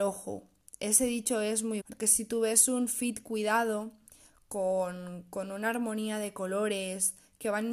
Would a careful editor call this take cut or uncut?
cut